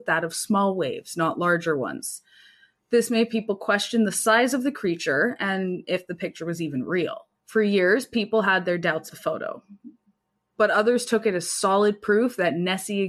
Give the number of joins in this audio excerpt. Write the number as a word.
two